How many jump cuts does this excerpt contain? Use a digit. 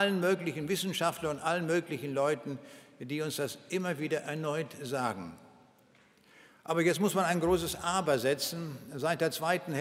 0